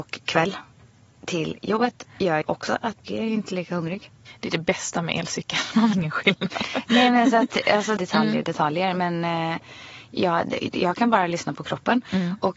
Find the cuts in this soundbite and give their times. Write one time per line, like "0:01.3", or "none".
0:02.4
0:03.0
0:05.9
0:08.0